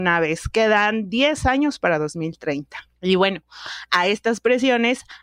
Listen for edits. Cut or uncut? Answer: uncut